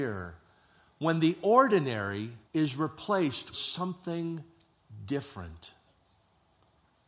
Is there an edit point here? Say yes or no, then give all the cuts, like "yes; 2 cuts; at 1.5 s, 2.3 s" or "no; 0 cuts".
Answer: yes; 2 cuts; at 2.4 s, 3.5 s